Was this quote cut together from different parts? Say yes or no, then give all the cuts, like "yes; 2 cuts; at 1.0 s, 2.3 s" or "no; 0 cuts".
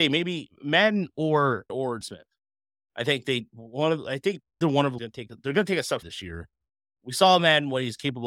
yes; 5 cuts; at 1.7 s, 2.0 s, 4.6 s, 5.0 s, 6.0 s